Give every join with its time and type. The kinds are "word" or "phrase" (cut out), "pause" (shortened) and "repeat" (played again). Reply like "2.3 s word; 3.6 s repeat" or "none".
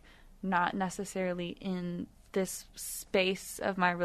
2.7 s pause